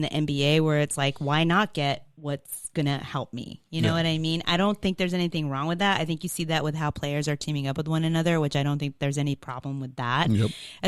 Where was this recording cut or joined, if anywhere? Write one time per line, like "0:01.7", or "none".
none